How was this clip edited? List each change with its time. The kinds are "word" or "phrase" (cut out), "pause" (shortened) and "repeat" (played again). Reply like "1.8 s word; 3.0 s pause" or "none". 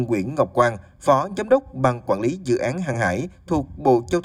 none